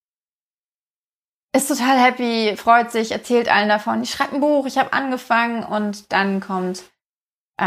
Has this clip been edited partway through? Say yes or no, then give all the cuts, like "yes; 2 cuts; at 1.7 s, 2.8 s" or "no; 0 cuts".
no; 0 cuts